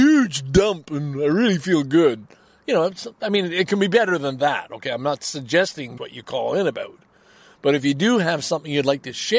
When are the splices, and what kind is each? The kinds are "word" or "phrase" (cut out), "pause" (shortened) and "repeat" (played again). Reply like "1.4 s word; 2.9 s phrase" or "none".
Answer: 6.0 s word